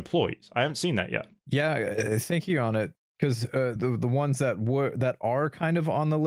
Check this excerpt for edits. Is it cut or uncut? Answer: cut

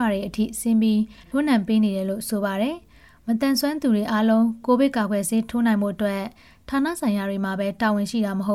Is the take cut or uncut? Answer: uncut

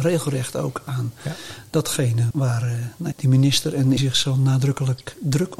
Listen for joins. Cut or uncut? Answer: cut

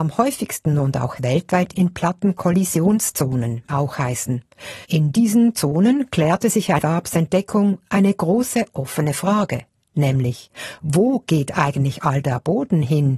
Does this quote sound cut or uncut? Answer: cut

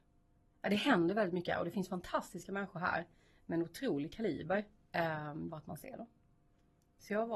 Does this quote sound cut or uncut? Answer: cut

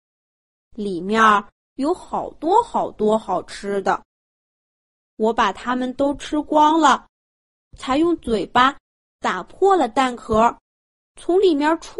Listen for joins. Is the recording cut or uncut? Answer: uncut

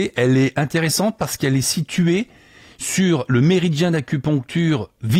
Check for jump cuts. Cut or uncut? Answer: uncut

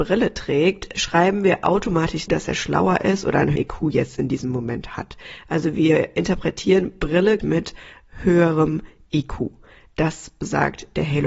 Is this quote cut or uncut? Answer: cut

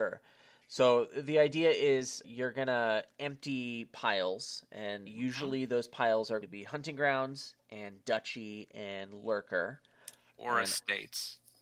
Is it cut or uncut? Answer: cut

